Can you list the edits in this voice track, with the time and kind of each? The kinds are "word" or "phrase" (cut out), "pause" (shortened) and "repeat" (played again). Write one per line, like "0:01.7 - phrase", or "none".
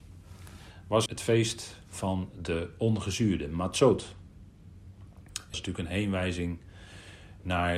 0:01.1 - word
0:05.5 - word